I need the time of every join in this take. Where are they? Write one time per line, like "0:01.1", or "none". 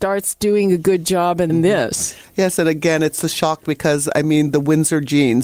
0:01.5

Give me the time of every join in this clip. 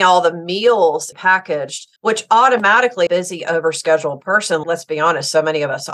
0:01.1
0:02.0
0:03.1
0:04.6

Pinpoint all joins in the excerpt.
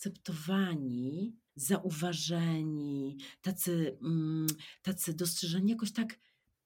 0:01.5

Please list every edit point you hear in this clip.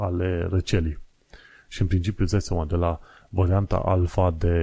none

